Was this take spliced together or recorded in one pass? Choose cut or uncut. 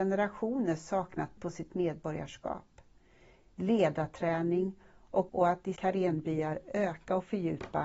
cut